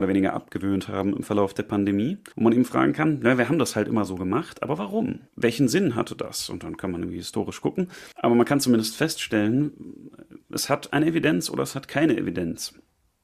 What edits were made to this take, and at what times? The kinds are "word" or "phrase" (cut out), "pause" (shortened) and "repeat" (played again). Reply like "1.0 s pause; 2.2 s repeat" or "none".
2.3 s pause; 5.3 s pause; 8.1 s pause